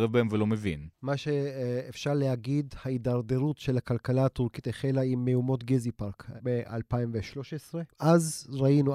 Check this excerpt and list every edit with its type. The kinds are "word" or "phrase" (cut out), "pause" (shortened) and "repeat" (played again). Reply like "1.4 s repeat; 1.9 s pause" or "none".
0.9 s pause; 7.9 s pause